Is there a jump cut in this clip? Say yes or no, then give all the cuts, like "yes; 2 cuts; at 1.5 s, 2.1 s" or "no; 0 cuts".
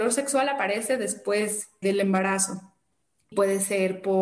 yes; 2 cuts; at 1.8 s, 3.3 s